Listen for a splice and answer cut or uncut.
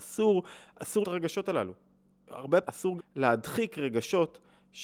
cut